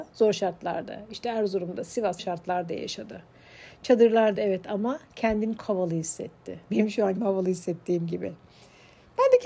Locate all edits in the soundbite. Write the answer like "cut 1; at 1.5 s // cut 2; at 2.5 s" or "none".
cut 1; at 2.2 s // cut 2; at 4.3 s // cut 3; at 5.6 s // cut 4; at 7.2 s